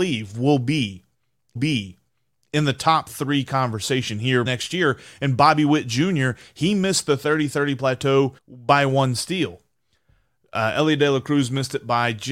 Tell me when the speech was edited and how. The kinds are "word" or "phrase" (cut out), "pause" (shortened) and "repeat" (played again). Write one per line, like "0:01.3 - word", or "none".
0:01.6 - repeat
0:04.5 - word
0:08.4 - pause